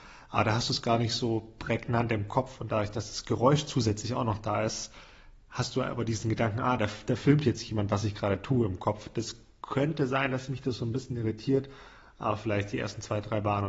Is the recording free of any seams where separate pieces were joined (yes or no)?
yes